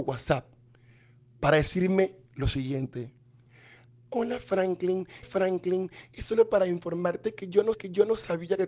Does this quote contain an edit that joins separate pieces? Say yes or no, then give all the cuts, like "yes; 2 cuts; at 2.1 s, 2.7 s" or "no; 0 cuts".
yes; 2 cuts; at 5.2 s, 7.7 s